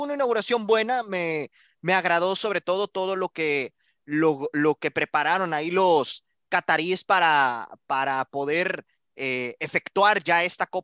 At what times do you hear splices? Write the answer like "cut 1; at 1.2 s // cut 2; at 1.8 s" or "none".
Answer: none